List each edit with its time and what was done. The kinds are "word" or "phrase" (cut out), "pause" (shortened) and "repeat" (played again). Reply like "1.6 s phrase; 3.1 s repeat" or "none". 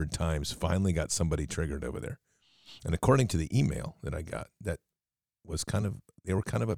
none